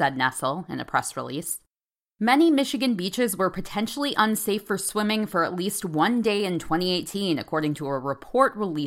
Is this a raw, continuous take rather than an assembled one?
yes; 0 cuts

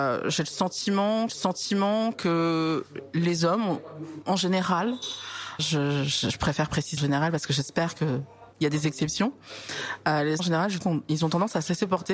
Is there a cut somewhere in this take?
yes; 7 cuts; at 1.3 s, 4.2 s, 5.6 s, 7.0 s, 8.5 s, 10.4 s, 10.8 s

